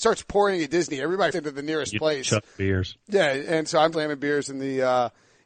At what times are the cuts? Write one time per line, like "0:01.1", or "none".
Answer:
0:01.3
0:03.9